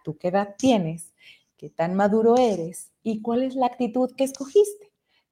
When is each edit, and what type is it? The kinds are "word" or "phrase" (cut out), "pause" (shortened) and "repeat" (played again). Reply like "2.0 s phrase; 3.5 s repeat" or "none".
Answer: none